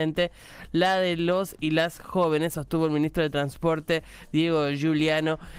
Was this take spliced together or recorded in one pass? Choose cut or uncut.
uncut